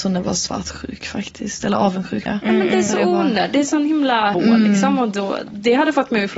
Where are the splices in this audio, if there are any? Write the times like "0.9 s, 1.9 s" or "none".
2.3 s, 4.3 s, 5.5 s